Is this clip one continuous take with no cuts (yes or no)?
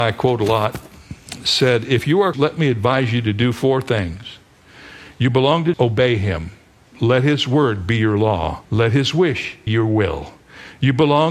no